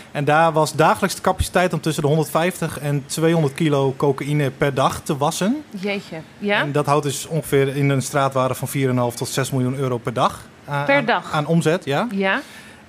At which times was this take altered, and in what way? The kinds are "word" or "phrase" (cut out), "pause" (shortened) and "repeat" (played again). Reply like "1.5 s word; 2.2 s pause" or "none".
none